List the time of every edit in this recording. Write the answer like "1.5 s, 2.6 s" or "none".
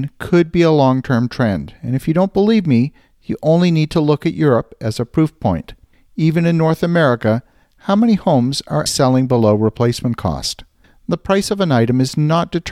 8.9 s